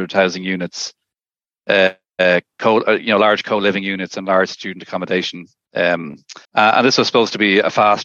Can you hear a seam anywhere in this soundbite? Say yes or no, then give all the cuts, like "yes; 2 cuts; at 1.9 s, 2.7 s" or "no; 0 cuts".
yes; 1 cut; at 6.4 s